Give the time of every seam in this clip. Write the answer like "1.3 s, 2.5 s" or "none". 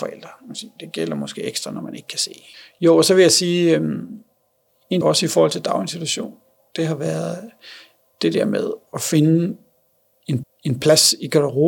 5.0 s, 10.4 s